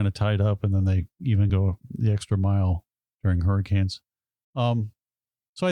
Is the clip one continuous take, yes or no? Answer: yes